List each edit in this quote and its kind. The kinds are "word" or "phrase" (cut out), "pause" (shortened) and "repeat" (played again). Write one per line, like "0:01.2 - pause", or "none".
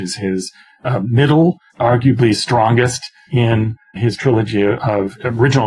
0:01.7 - word
0:04.0 - word